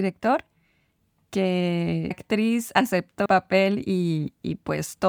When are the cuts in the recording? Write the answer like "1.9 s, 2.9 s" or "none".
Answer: 2.1 s, 3.3 s